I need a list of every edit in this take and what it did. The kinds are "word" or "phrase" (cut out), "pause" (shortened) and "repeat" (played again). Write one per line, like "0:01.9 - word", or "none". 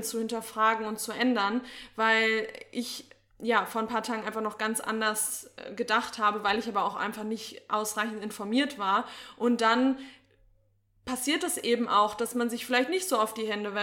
none